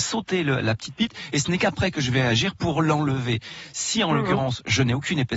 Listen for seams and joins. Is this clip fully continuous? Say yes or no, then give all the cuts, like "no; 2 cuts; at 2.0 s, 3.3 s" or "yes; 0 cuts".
yes; 0 cuts